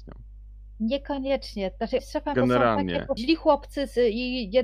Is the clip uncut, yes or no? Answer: no